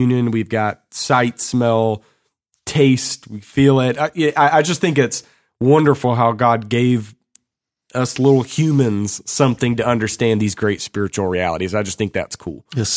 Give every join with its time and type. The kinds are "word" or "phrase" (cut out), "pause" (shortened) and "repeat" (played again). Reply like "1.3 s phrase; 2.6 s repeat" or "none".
none

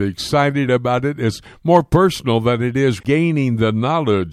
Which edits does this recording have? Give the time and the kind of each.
3.0 s word

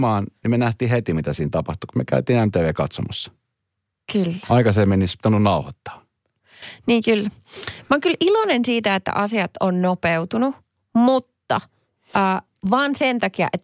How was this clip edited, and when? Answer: none

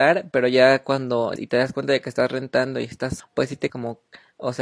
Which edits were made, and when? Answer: 1.4 s word; 3.2 s word; 3.7 s word

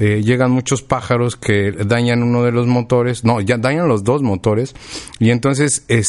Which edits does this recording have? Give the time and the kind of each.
none

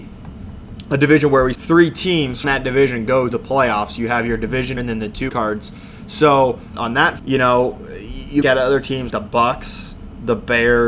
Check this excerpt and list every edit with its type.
1.5 s word; 2.4 s word; 3.3 s word; 4.8 s word; 5.3 s word; 6.7 s word; 7.2 s word; 8.4 s word; 9.1 s word

